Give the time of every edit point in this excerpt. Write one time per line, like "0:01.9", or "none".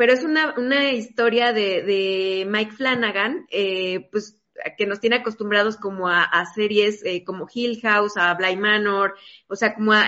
none